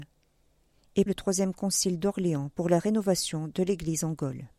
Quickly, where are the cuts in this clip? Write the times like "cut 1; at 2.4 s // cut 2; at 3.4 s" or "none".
cut 1; at 1.1 s